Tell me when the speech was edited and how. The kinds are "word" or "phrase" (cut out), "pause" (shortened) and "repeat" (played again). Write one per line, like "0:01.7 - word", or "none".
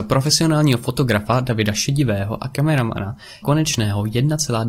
0:03.4 - word